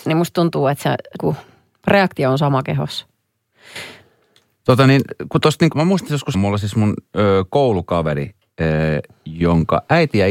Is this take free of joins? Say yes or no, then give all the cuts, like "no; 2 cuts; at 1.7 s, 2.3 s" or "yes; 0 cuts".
no; 3 cuts; at 1.2 s, 5.7 s, 6.3 s